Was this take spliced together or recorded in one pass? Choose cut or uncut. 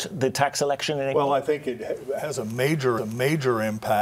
cut